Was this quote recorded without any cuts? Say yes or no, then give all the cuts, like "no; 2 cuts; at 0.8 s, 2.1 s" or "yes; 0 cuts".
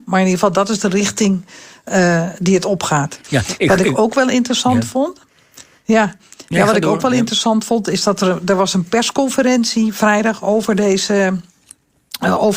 yes; 0 cuts